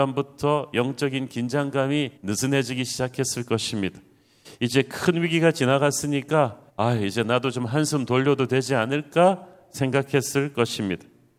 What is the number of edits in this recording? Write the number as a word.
two